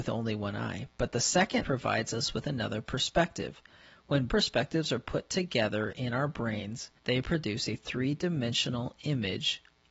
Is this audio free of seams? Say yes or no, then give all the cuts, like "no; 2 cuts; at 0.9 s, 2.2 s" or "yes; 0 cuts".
no; 3 cuts; at 1.6 s, 4.3 s, 7.0 s